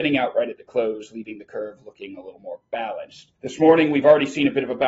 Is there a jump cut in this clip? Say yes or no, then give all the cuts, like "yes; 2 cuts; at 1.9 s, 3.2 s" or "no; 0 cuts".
yes; 1 cut; at 3.4 s